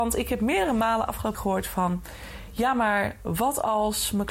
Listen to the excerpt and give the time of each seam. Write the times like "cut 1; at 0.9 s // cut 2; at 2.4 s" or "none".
cut 1; at 1.3 s